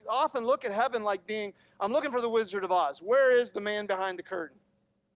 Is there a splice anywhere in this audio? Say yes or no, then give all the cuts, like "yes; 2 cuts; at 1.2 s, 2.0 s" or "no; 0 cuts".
no; 0 cuts